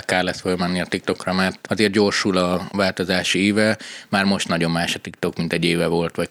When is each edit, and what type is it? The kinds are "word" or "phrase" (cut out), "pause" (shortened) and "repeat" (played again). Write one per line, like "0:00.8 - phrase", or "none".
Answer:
none